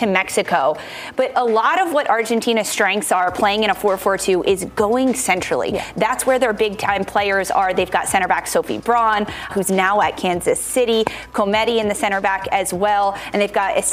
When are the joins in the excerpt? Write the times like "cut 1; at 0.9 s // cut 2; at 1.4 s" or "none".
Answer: cut 1; at 1.3 s // cut 2; at 9.5 s